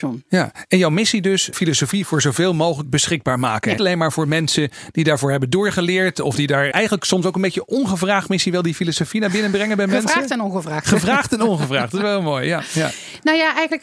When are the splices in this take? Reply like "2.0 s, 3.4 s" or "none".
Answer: 1.5 s, 2.8 s, 3.8 s, 6.7 s

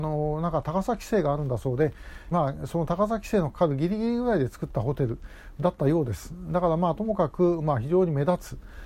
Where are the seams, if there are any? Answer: 2.3 s

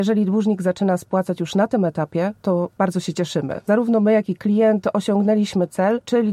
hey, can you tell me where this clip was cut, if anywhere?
2.4 s

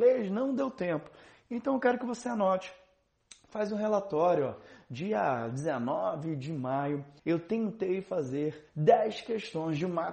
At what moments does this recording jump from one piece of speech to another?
7.2 s, 8.7 s

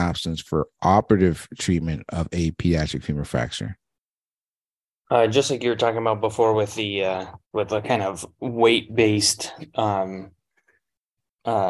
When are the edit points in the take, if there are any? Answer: 7.4 s

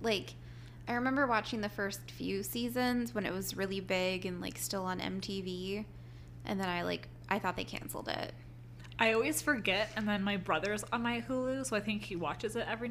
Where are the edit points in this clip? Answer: none

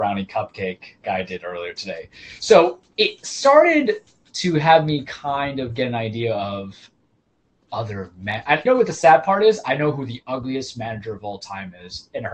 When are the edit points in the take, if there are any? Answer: 1.0 s, 8.7 s

